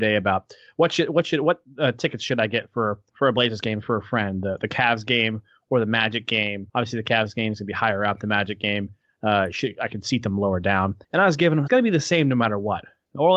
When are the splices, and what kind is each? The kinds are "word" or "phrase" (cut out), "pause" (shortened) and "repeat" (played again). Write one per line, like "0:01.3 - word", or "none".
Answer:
0:03.1 - word
0:06.7 - pause
0:11.0 - pause
0:11.7 - phrase